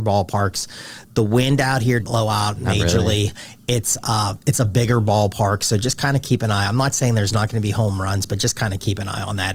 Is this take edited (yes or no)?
yes